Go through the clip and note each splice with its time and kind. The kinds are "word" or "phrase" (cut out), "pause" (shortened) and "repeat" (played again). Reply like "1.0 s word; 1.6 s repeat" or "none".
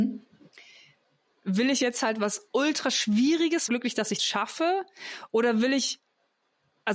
3.7 s phrase; 4.2 s word